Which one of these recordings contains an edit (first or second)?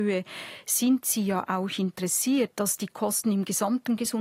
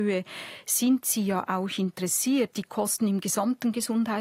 second